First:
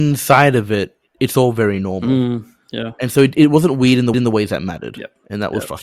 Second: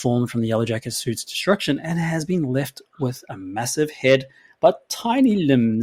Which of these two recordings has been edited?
first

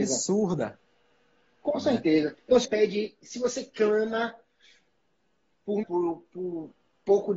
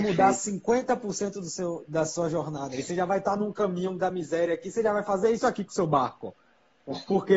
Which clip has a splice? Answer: first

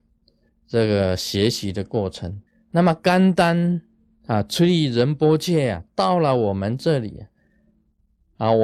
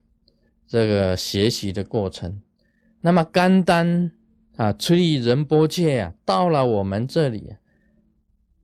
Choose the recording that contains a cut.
first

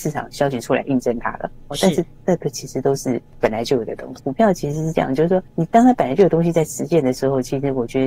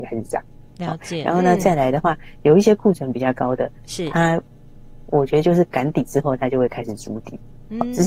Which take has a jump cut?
first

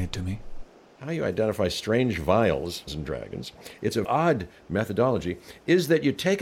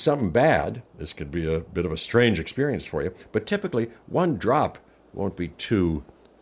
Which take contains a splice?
first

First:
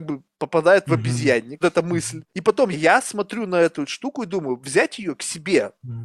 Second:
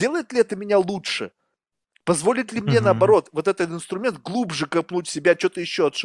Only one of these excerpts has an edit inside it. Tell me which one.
first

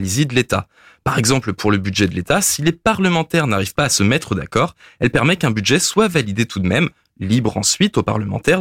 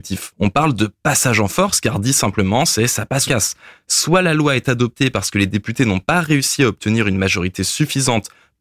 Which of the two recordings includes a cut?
second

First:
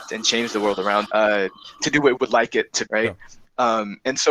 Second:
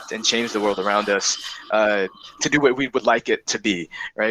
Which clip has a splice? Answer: first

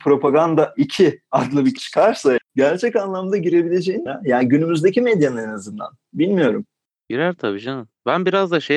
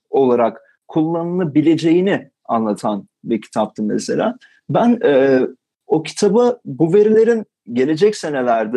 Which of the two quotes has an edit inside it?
first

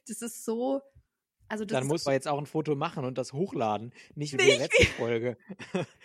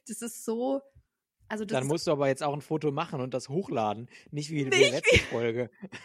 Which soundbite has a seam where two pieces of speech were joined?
first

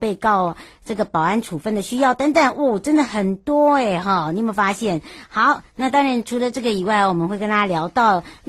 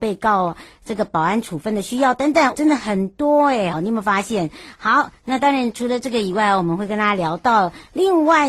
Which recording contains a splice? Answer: second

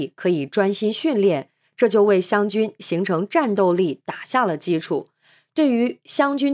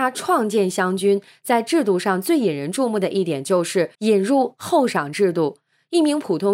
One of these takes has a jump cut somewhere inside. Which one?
second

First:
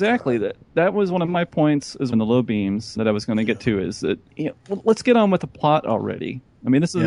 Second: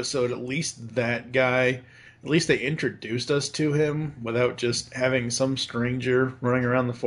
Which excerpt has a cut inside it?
first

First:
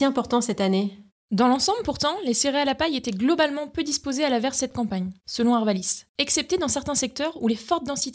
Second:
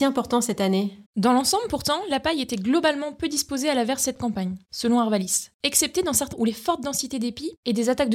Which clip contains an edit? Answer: second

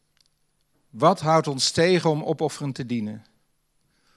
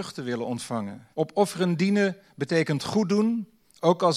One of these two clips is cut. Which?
second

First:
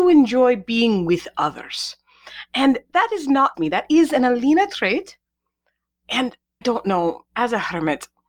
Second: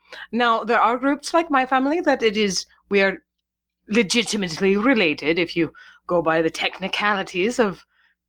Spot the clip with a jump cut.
first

